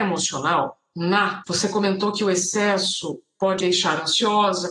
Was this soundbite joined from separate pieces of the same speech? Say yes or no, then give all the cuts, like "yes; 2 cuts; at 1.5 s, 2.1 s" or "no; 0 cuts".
yes; 2 cuts; at 1.4 s, 3.6 s